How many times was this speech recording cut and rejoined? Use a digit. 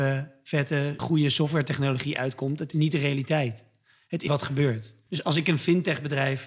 4